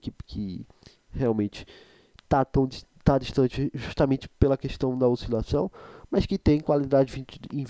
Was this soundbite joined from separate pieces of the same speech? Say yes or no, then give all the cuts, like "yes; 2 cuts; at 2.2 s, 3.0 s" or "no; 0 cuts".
no; 0 cuts